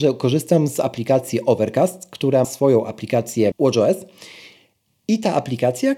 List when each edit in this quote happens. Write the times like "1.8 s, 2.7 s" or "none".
2.4 s, 3.5 s